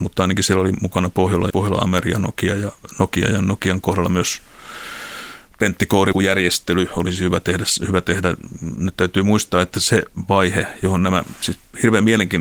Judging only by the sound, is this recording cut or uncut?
cut